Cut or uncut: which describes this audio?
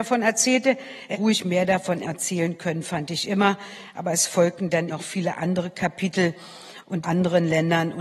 cut